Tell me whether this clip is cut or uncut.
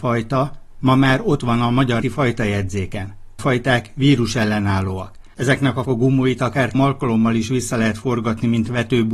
cut